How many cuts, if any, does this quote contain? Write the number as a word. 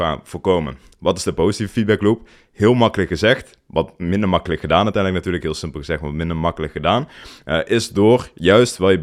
zero